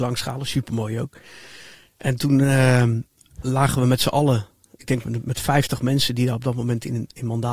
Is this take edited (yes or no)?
no